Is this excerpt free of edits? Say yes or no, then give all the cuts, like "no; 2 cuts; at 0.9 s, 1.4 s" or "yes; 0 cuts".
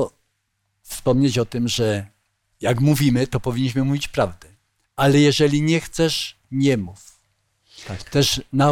no; 1 cut; at 6.5 s